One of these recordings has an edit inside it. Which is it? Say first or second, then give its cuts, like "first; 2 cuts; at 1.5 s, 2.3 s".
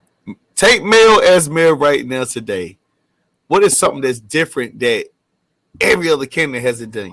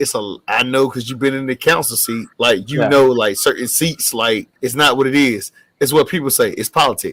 second; 2 cuts; at 2.3 s, 4.6 s